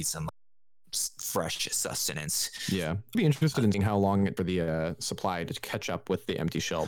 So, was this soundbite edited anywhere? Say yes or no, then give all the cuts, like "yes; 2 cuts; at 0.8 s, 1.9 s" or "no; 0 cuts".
yes; 3 cuts; at 3.1 s, 3.7 s, 4.4 s